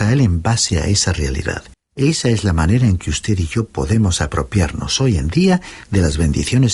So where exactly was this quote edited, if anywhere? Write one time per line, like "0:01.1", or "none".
0:01.7